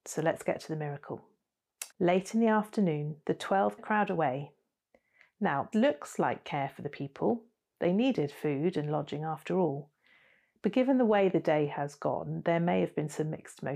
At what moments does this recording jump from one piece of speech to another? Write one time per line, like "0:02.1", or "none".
0:01.9
0:03.8
0:05.7